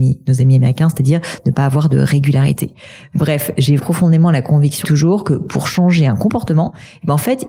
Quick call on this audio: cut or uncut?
cut